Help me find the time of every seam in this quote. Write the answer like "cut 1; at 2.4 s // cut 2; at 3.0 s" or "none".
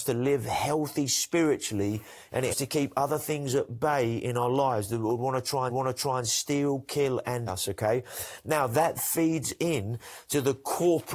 cut 1; at 2.5 s // cut 2; at 5.7 s // cut 3; at 7.5 s // cut 4; at 9.0 s